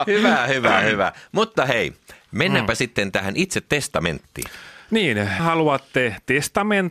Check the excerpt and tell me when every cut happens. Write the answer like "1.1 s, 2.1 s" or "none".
5.4 s